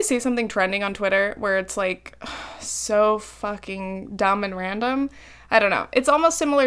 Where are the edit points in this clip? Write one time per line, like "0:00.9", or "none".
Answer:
none